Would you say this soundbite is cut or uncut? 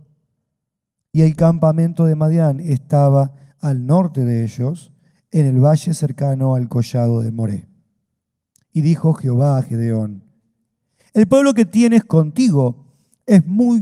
uncut